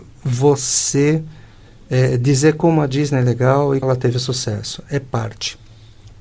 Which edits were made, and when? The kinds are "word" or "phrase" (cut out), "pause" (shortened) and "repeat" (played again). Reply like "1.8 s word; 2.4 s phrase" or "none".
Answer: 3.8 s word